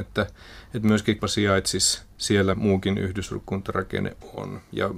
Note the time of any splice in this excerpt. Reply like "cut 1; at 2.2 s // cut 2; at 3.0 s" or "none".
cut 1; at 1.2 s // cut 2; at 2.5 s